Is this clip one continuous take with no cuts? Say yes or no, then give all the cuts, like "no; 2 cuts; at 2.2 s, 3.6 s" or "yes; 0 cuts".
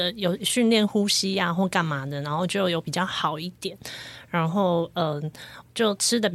yes; 0 cuts